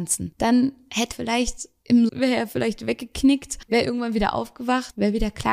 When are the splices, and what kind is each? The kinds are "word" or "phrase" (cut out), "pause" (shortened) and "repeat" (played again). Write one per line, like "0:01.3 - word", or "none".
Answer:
0:01.1 - word
0:02.1 - word